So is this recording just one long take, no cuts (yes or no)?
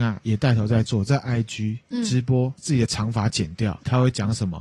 yes